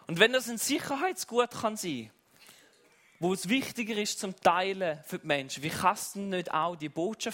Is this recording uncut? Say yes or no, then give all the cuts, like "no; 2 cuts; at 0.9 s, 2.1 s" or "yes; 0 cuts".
yes; 0 cuts